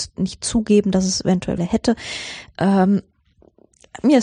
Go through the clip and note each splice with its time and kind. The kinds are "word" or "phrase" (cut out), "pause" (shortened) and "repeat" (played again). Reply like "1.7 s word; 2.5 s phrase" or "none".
1.6 s word